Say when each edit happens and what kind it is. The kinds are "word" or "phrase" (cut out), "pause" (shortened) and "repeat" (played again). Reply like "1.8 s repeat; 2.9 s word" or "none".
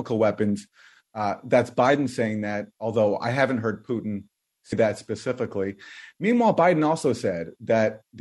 4.7 s word